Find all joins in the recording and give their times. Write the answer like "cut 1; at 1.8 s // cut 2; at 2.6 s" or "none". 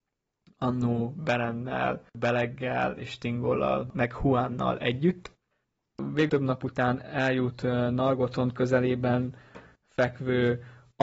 cut 1; at 2.1 s // cut 2; at 6.3 s